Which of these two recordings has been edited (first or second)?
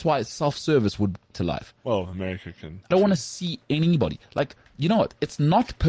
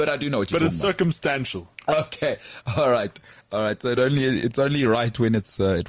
first